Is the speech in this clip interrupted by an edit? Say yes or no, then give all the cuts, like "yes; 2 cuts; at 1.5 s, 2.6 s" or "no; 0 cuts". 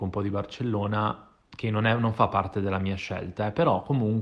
no; 0 cuts